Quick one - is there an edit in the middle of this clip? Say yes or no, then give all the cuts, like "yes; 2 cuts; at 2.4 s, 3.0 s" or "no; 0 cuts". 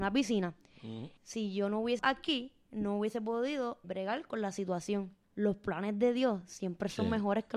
yes; 4 cuts; at 1.2 s, 2.0 s, 3.8 s, 5.2 s